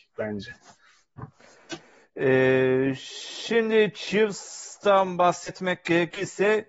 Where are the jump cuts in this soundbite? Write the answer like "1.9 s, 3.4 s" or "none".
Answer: none